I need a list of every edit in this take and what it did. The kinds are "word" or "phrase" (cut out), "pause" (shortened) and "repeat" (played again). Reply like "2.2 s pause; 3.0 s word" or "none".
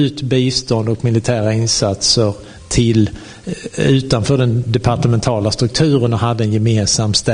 none